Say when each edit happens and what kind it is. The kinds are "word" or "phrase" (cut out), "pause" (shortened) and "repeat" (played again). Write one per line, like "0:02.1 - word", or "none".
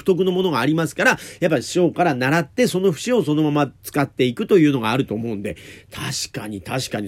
0:03.8 - pause